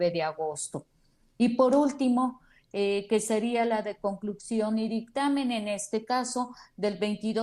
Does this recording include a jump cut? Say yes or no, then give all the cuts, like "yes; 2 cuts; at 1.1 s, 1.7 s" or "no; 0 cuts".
no; 0 cuts